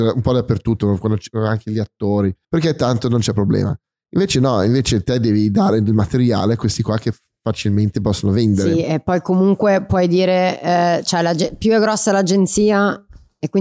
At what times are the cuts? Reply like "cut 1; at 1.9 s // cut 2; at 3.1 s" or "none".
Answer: cut 1; at 2.4 s